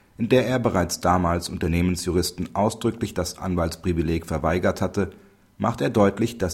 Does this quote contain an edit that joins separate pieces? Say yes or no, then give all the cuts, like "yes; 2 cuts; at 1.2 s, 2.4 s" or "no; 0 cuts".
no; 0 cuts